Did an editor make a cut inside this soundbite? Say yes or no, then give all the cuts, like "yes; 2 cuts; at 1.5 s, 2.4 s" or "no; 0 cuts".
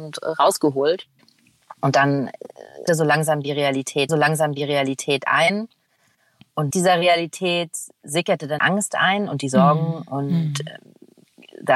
yes; 5 cuts; at 1.8 s, 2.9 s, 4.1 s, 6.7 s, 8.6 s